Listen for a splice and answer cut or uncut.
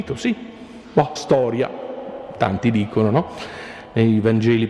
cut